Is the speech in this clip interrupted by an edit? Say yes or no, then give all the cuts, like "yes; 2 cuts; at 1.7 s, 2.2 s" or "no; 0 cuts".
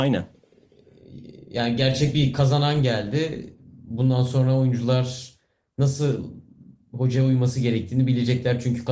no; 0 cuts